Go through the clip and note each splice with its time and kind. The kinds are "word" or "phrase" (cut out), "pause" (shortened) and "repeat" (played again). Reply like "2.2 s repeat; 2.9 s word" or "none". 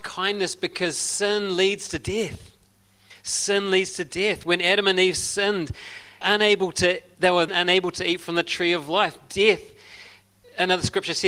6.2 s phrase; 7.5 s word